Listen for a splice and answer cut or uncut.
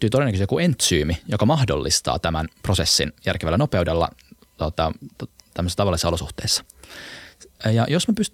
uncut